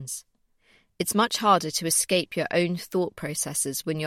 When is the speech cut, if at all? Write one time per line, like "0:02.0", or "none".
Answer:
none